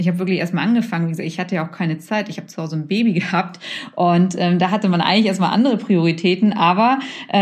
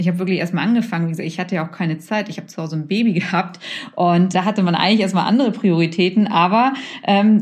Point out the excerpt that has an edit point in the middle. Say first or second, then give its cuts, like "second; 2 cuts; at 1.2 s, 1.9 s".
second; 1 cut; at 4.3 s